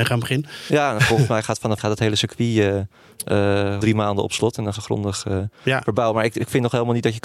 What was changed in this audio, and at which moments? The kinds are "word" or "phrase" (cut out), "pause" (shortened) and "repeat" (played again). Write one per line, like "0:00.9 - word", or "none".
0:01.8 - word
0:03.8 - word
0:04.7 - word